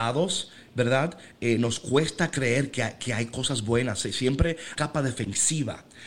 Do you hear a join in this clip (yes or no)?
yes